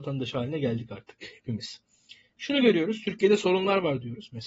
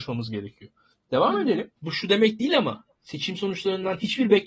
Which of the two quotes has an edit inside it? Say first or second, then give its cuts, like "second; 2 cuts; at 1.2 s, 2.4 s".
second; 1 cut; at 1.8 s